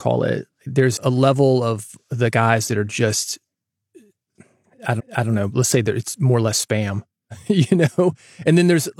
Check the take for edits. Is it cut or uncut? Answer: cut